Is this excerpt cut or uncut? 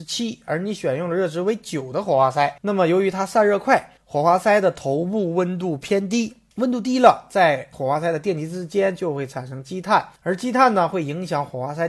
cut